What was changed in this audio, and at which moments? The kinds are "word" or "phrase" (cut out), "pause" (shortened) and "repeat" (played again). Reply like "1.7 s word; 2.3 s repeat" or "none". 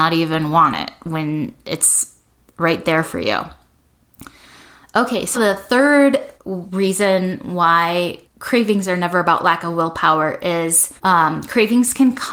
5.3 s word; 6.4 s pause; 8.2 s pause; 11.0 s pause